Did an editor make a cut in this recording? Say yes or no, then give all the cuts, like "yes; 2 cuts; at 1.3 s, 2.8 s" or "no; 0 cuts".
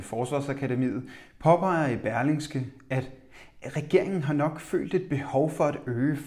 no; 0 cuts